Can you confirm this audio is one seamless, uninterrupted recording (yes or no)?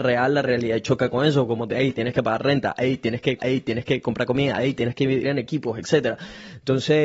no